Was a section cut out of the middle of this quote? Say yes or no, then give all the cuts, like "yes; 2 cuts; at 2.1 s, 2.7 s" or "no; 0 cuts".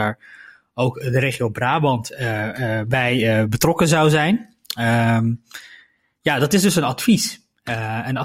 no; 0 cuts